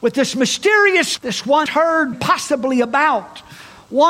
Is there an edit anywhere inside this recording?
yes; 3 cuts; at 1.2 s, 1.7 s, 2.1 s

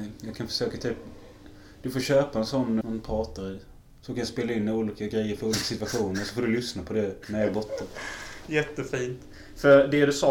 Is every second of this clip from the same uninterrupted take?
no; 2 cuts; at 2.8 s, 3.8 s

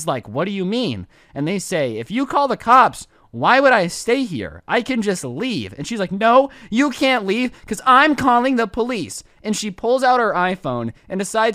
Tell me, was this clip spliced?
no; 0 cuts

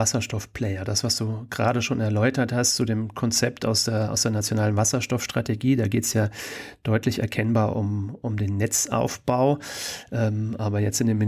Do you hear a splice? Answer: no; 0 cuts

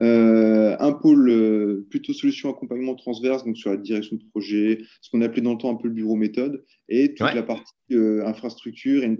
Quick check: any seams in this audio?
no; 0 cuts

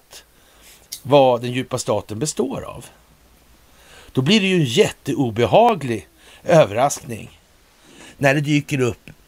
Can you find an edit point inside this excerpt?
no; 0 cuts

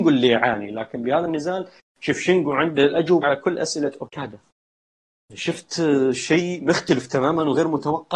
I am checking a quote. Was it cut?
no; 0 cuts

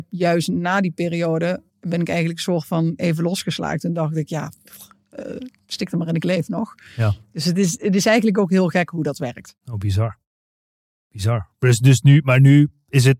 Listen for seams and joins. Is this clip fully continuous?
no; 2 cuts; at 1.7 s, 9.6 s

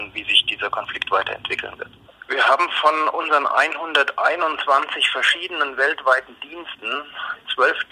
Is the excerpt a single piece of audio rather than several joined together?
yes; 0 cuts

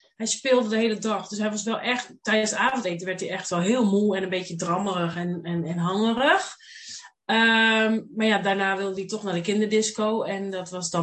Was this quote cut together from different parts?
no; 0 cuts

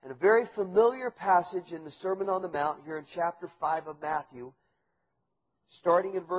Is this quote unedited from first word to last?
yes; 0 cuts

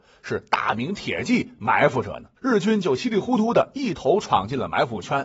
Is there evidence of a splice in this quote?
yes; 1 cut; at 2.4 s

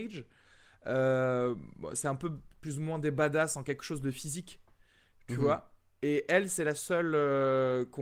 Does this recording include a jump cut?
no; 0 cuts

